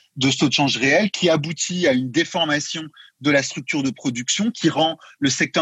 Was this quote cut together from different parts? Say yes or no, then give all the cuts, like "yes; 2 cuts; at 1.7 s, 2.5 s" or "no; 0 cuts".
no; 0 cuts